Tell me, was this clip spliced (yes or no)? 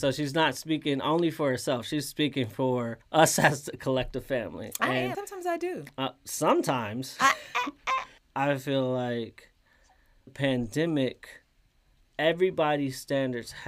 yes